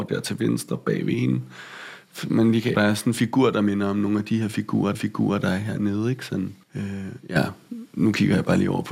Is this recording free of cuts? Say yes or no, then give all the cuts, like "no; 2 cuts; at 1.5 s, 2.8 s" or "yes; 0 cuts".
no; 3 cuts; at 2.7 s, 4.9 s, 6.6 s